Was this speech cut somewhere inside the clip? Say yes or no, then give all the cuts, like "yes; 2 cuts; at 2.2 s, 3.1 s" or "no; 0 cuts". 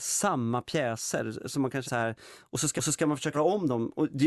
yes; 3 cuts; at 1.8 s, 2.8 s, 3.3 s